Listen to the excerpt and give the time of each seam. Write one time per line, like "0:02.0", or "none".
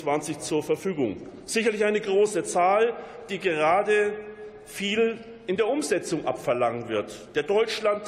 none